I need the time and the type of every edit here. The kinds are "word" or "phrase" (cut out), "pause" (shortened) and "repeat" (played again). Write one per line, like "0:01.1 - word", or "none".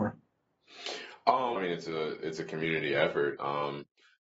0:01.6 - word